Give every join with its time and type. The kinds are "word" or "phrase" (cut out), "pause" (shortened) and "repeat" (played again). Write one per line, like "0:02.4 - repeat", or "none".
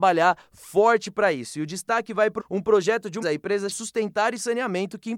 0:02.4 - word
0:03.2 - word
0:03.7 - word